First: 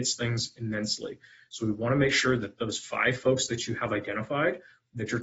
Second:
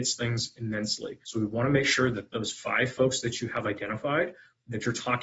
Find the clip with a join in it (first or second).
second